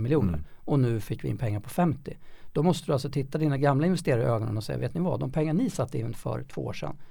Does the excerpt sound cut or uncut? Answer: uncut